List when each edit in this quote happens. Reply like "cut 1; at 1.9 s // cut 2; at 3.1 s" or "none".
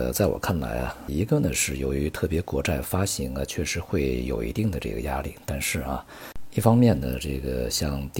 cut 1; at 1.1 s